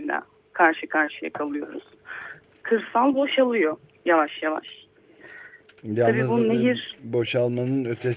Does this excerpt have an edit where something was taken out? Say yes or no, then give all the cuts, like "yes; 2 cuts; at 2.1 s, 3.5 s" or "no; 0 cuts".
no; 0 cuts